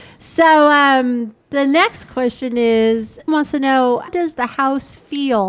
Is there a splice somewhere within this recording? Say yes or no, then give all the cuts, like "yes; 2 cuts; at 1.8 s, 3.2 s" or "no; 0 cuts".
yes; 3 cuts; at 1.4 s, 3.3 s, 4.1 s